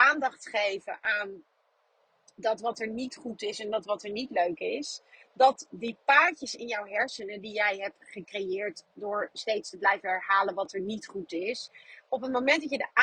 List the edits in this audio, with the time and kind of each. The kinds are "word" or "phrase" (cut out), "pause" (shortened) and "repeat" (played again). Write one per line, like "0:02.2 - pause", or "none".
none